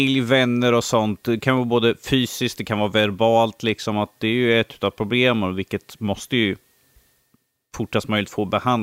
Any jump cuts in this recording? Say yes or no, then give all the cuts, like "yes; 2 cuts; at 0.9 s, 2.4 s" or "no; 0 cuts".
no; 0 cuts